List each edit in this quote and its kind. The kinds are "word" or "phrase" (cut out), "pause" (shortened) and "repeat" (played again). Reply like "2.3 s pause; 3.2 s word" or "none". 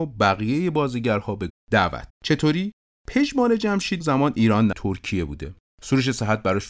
1.5 s word; 2.1 s word; 4.0 s word; 4.7 s word